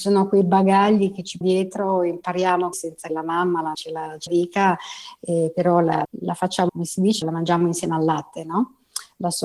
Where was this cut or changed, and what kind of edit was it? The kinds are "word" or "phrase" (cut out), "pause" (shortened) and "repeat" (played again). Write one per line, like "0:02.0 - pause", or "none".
0:01.4 - word
0:02.7 - word
0:03.1 - word
0:03.7 - word
0:04.3 - word
0:06.0 - word
0:06.7 - word
0:07.2 - word